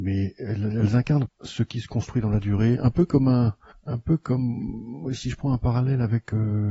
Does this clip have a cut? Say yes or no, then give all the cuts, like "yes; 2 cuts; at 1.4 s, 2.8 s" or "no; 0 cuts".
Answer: yes; 2 cuts; at 1.3 s, 3.7 s